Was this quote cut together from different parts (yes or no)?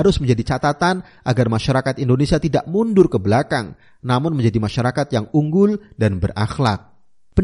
no